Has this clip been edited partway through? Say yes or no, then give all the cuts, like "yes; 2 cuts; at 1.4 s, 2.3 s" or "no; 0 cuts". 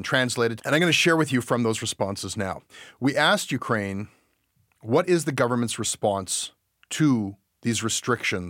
no; 0 cuts